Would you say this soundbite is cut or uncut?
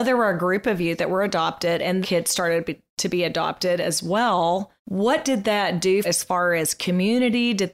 cut